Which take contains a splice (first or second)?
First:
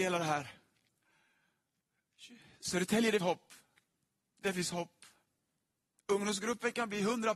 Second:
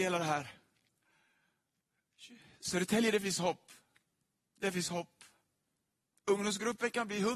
first